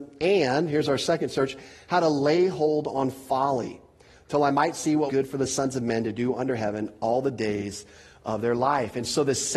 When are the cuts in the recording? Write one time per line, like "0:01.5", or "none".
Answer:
0:05.1